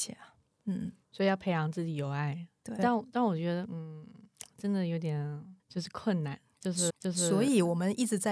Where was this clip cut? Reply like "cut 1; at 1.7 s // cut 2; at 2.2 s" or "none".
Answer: cut 1; at 2.8 s // cut 2; at 5.6 s // cut 3; at 6.9 s